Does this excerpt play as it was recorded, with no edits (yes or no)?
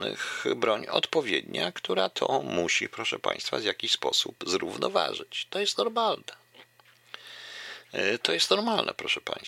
yes